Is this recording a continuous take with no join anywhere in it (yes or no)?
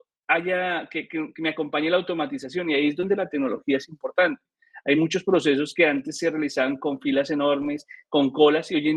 yes